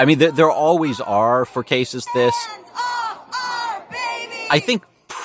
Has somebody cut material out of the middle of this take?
yes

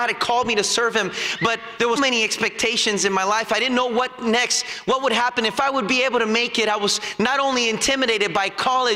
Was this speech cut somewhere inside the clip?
yes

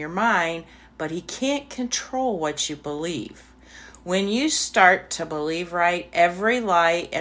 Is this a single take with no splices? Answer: yes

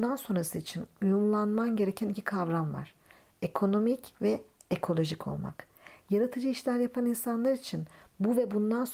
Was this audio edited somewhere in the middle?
no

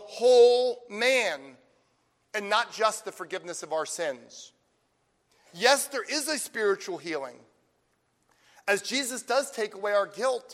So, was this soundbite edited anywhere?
no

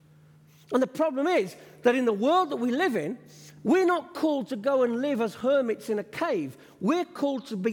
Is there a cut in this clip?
no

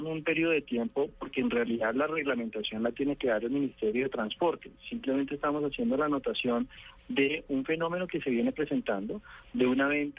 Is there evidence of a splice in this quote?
no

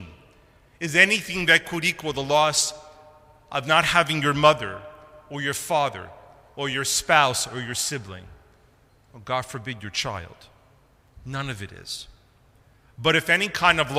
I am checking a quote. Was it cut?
no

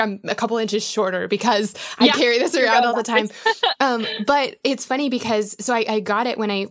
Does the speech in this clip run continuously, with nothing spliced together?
yes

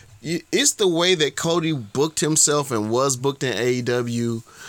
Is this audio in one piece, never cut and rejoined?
yes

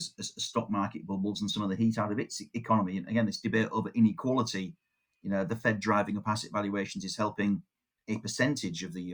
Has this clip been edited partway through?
no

